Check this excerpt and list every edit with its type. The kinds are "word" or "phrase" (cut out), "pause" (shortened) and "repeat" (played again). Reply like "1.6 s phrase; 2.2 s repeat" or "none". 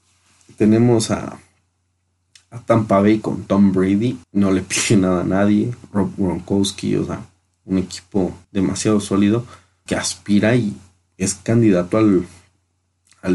3.2 s word; 4.2 s pause; 8.4 s pause; 9.9 s word